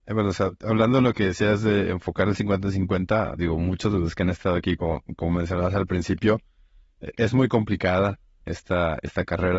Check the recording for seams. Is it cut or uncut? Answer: uncut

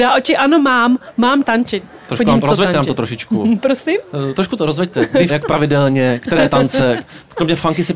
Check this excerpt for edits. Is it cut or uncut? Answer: cut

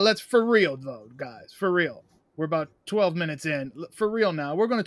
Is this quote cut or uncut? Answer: uncut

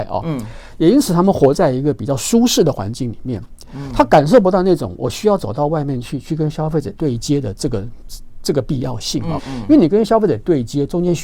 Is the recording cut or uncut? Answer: cut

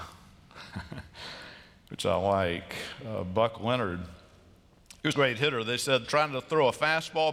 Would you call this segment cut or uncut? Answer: cut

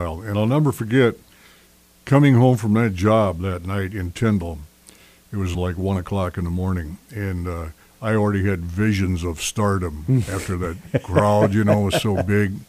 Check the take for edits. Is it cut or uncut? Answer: uncut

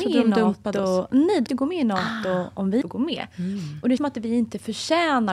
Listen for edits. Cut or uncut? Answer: cut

